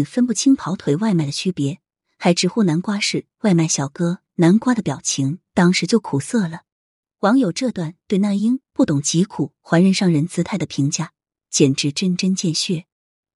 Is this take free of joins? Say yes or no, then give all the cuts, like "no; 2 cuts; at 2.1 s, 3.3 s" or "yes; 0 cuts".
yes; 0 cuts